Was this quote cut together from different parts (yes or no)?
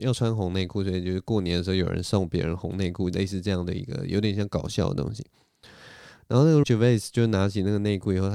yes